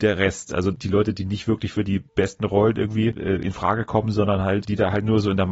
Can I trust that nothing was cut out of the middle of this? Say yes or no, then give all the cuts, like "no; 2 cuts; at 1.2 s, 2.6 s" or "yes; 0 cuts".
no; 1 cut; at 2.1 s